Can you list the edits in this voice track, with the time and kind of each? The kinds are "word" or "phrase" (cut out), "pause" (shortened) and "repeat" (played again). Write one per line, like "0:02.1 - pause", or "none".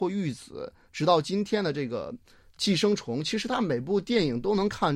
none